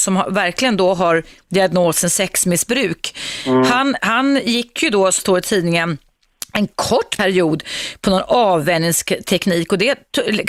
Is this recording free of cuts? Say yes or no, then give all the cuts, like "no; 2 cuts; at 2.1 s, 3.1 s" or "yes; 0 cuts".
no; 2 cuts; at 4.0 s, 5.2 s